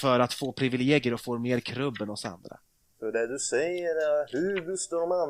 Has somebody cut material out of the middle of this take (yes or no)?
no